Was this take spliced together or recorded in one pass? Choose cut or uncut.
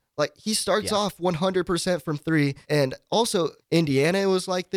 cut